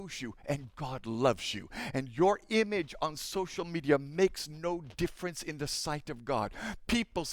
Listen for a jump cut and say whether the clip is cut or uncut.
uncut